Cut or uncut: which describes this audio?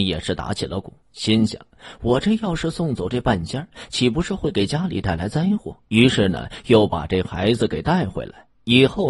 cut